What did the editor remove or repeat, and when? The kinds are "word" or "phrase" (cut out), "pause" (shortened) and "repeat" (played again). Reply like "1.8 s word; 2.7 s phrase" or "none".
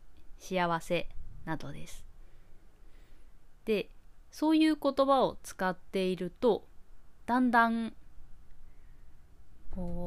none